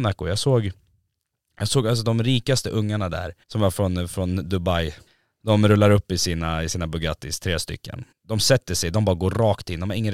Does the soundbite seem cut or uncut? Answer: cut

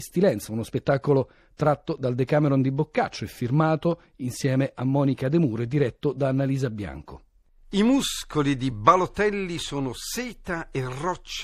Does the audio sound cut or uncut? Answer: uncut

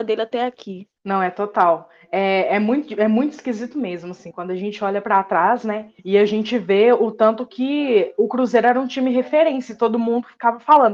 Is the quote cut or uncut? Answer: cut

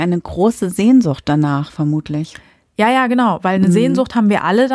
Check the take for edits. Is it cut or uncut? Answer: uncut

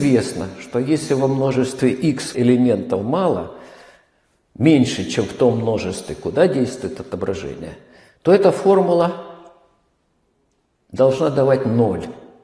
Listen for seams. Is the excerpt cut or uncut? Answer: cut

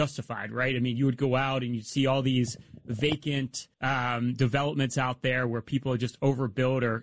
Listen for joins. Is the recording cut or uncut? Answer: cut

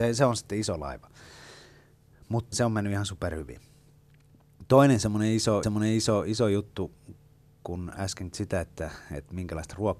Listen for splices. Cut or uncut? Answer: cut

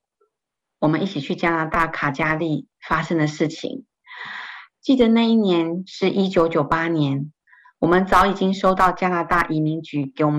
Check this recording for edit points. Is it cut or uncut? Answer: uncut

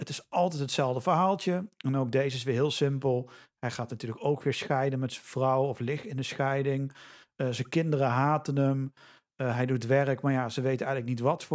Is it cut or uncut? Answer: uncut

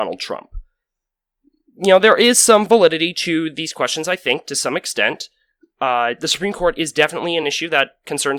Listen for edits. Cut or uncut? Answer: uncut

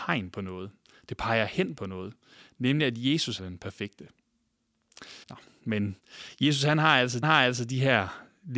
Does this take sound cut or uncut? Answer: cut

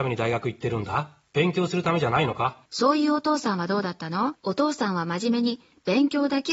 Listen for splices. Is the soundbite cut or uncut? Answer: cut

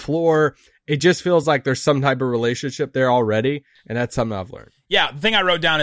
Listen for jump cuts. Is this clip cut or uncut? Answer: uncut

